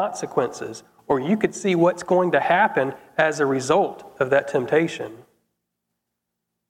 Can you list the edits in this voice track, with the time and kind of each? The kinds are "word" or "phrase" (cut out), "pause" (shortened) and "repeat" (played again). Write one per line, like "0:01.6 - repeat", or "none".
none